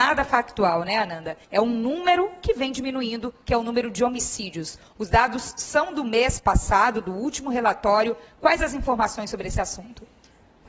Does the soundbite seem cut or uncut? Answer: cut